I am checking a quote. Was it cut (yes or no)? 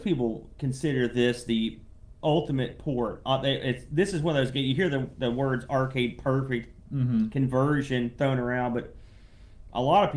no